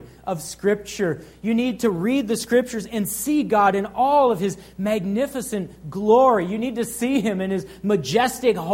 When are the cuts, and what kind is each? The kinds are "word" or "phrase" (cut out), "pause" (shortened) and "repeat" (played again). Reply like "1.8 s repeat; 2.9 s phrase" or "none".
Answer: none